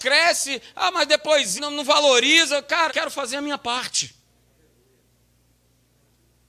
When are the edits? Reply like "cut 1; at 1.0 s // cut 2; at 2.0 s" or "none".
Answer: cut 1; at 1.6 s // cut 2; at 2.9 s